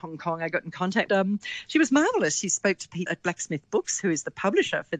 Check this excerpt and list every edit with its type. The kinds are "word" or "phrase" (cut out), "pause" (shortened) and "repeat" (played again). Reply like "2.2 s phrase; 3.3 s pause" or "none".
1.1 s phrase; 3.1 s word

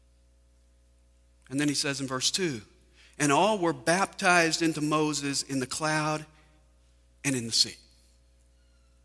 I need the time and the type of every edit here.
none

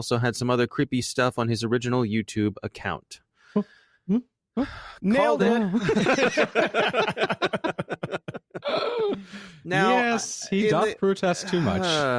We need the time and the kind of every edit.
none

